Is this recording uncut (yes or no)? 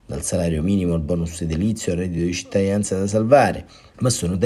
yes